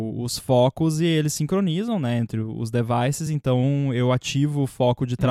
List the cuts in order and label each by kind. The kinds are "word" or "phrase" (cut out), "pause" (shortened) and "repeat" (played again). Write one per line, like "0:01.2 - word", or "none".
none